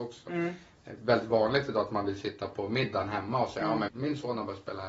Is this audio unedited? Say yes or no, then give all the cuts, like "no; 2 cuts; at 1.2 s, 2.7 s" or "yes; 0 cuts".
no; 1 cut; at 3.9 s